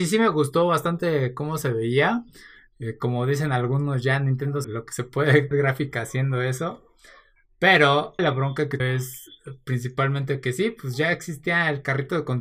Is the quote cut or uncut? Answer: cut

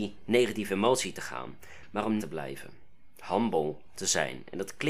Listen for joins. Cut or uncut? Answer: cut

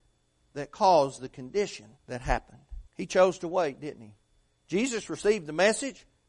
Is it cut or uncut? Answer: cut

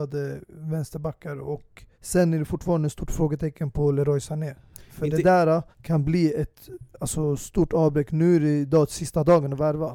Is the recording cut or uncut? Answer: cut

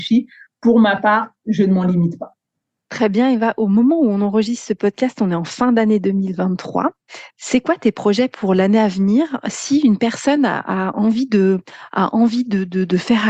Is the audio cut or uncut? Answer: uncut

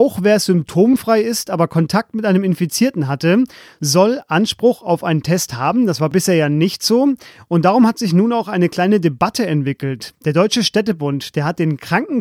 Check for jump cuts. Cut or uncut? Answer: uncut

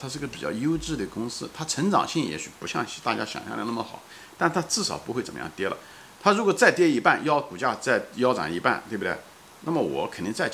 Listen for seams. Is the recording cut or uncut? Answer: uncut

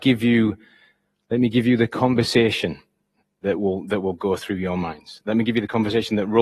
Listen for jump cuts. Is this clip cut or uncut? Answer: uncut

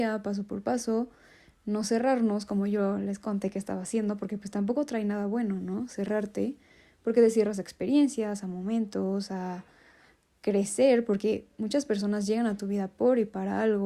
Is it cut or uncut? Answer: uncut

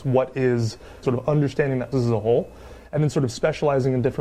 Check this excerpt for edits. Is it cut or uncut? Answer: cut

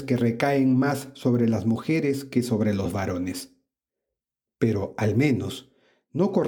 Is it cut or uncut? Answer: uncut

